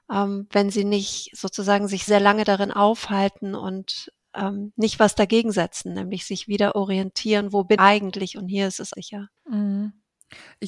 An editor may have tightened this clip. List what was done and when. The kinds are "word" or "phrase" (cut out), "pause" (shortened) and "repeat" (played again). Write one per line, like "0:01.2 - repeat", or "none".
0:02.1 - word
0:07.8 - word
0:08.9 - word
0:09.4 - pause